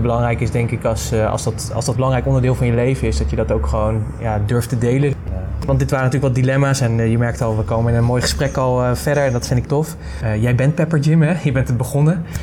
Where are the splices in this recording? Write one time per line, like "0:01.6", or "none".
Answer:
0:02.0
0:09.6